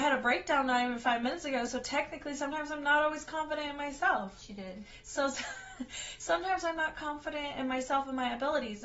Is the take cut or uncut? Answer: uncut